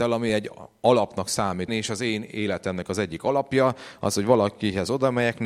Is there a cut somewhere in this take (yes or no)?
yes